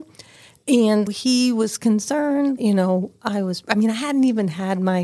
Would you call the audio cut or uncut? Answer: cut